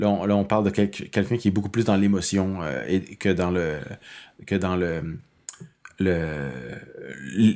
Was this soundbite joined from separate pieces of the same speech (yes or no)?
no